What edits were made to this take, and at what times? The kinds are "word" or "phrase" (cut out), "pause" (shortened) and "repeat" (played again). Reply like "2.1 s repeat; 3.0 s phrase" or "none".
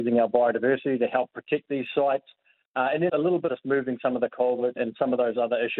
3.1 s word; 3.5 s phrase; 4.8 s word

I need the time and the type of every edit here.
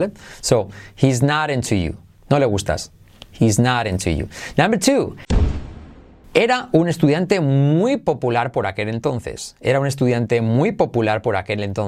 none

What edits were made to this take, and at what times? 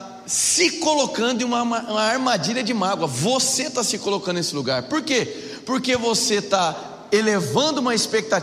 none

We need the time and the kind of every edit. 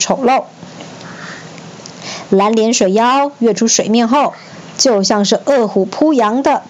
none

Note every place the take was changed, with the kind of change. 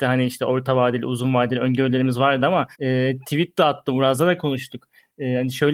2.7 s pause

